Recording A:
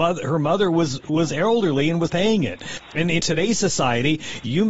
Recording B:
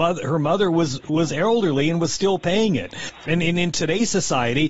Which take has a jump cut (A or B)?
A